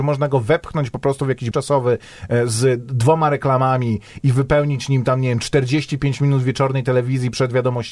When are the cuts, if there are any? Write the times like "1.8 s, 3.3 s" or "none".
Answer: 1.5 s